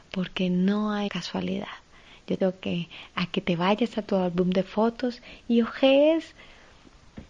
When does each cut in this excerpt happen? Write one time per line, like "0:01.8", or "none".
0:01.1
0:02.4